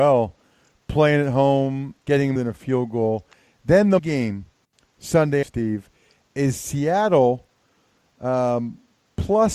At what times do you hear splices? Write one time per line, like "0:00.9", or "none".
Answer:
0:02.0
0:02.4
0:04.0
0:05.4